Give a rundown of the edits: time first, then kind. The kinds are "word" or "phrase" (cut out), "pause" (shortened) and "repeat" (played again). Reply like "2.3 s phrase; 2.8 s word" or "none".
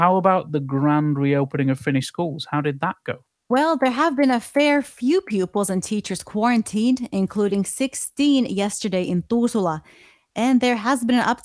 none